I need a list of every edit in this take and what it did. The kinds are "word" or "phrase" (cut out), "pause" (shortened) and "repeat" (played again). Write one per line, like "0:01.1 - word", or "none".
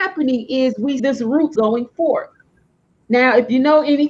0:01.0 - word
0:01.6 - word